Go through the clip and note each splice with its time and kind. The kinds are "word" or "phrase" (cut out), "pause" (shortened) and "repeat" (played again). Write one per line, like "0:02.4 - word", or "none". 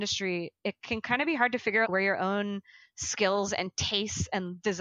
0:01.8 - phrase